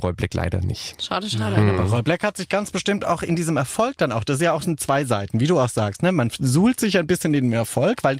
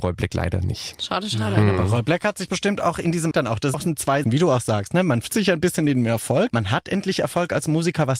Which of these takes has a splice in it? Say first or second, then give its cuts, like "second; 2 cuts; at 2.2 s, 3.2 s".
second; 6 cuts; at 2.5 s, 3.3 s, 3.7 s, 4.2 s, 5.3 s, 6.5 s